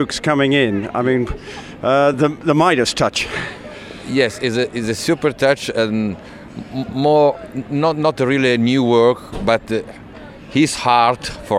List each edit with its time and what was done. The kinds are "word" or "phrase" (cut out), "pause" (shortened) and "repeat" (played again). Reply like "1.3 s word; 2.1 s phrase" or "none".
none